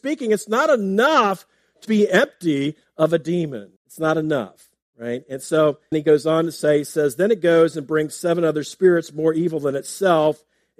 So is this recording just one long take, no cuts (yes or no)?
no